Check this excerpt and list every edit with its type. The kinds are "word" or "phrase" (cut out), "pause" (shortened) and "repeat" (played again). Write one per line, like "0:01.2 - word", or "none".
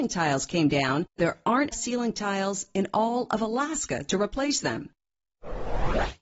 0:01.2 - word
0:01.7 - word